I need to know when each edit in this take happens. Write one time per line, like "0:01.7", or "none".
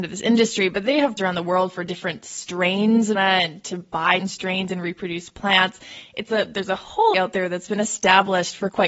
0:01.2
0:03.1
0:04.2
0:07.1